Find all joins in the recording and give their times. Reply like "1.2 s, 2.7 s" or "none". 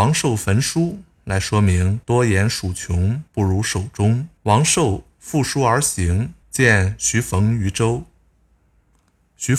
2.0 s, 3.3 s, 4.4 s, 6.4 s